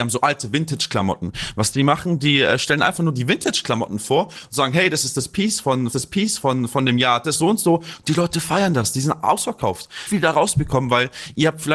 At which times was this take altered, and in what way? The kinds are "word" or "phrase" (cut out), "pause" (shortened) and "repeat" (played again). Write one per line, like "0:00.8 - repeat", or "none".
0:05.9 - repeat

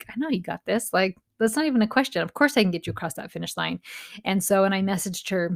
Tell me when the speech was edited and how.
none

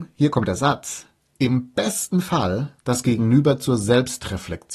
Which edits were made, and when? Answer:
0:01.2 - pause
0:02.8 - pause

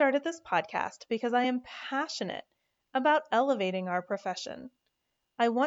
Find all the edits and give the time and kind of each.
none

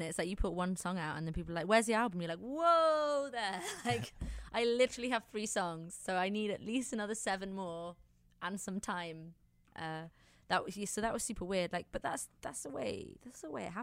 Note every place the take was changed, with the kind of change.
none

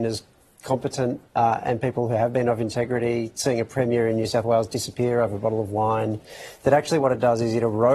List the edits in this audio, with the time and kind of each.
0:01.3 - pause

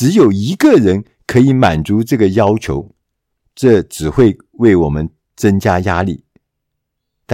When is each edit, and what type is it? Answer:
none

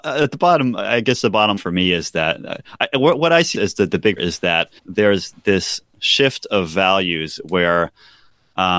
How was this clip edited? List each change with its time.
0:01.6 - word
0:03.5 - word
0:04.2 - phrase
0:04.8 - pause

